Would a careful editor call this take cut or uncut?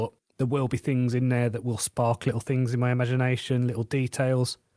uncut